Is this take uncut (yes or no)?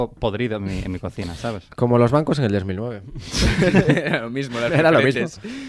yes